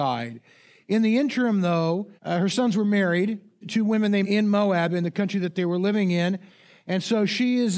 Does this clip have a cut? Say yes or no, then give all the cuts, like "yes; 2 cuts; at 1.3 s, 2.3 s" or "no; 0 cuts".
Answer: yes; 3 cuts; at 2.2 s, 3.6 s, 4.2 s